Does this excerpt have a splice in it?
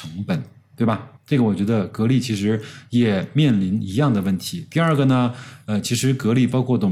yes; 1 cut; at 1.2 s

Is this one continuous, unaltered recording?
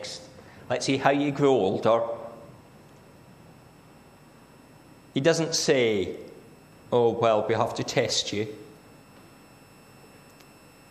yes; 0 cuts

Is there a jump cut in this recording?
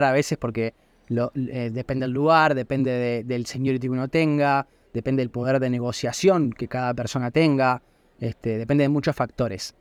no; 0 cuts

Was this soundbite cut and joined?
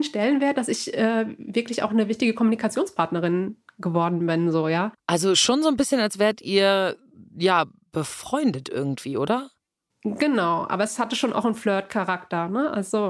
no; 0 cuts

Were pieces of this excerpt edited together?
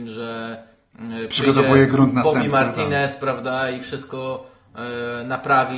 no; 0 cuts

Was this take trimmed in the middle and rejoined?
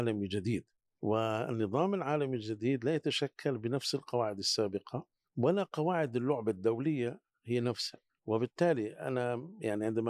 no; 0 cuts

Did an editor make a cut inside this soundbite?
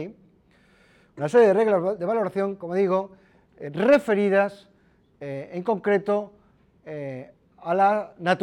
no; 0 cuts

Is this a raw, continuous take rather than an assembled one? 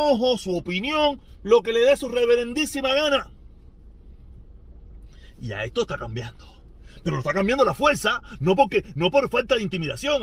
yes; 0 cuts

